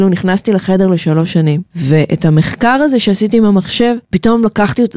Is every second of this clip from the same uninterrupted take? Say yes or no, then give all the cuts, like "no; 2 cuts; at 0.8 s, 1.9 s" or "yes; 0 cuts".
no; 2 cuts; at 1.7 s, 4.0 s